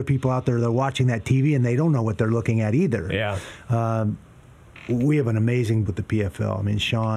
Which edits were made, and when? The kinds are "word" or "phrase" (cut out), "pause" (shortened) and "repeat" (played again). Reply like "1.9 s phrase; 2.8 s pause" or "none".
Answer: 5.9 s word